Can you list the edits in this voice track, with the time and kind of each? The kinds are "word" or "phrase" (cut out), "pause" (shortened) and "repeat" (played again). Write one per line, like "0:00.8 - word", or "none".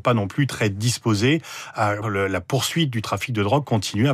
0:02.0 - word